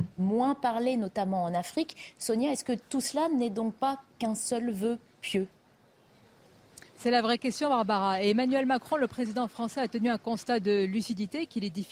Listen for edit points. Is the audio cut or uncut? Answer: cut